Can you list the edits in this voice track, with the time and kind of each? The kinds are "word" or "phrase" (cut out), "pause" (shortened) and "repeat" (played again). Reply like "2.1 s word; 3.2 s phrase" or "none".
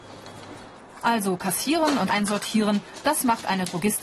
2.1 s phrase